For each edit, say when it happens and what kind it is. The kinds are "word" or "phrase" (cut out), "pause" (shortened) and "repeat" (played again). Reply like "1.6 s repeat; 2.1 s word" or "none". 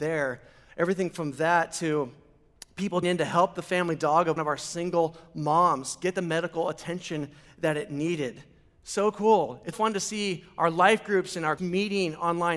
3.0 s word; 4.4 s word; 9.7 s word; 11.6 s word